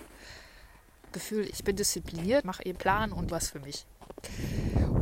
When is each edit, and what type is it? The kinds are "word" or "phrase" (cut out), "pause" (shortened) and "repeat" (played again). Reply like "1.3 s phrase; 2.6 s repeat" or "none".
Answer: 1.1 s phrase; 1.5 s word; 2.4 s word; 2.7 s word; 3.3 s phrase